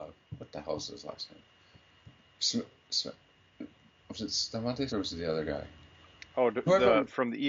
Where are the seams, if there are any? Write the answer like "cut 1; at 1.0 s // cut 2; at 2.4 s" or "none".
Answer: cut 1; at 4.9 s